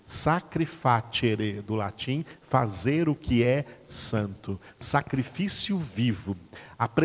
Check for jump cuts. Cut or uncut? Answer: uncut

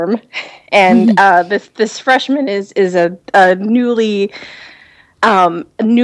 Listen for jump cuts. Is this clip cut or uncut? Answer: uncut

